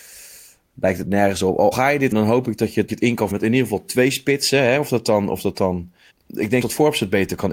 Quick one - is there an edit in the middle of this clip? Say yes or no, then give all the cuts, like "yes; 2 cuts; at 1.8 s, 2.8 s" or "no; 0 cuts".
yes; 6 cuts; at 1.7 s, 2.1 s, 2.9 s, 3.3 s, 6.1 s, 6.6 s